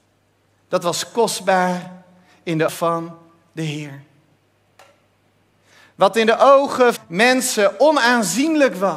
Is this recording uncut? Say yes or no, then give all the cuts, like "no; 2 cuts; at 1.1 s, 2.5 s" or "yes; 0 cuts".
no; 2 cuts; at 2.7 s, 7.0 s